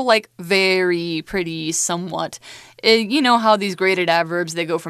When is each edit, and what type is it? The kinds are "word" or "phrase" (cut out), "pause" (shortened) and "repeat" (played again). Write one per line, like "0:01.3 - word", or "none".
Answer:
none